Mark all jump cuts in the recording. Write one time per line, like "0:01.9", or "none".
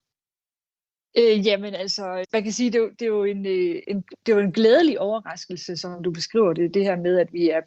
0:02.2
0:03.8